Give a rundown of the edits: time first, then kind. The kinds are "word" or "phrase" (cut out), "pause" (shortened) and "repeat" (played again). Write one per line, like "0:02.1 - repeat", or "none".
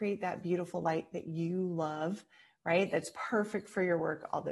none